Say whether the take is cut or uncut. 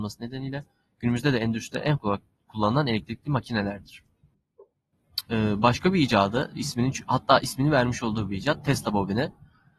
cut